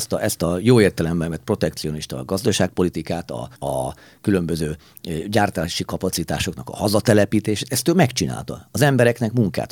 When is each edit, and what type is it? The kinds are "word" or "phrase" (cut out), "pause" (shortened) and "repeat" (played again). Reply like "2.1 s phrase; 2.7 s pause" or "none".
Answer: 3.5 s pause